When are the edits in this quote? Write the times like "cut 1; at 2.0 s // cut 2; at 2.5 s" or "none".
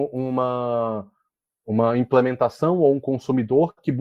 none